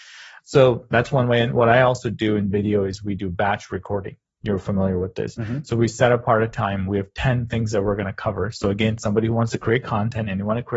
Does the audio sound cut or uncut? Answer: uncut